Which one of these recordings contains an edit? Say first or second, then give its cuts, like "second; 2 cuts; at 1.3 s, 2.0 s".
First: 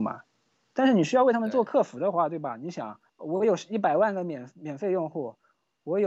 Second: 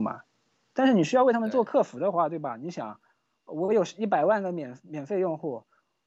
first; 1 cut; at 3.1 s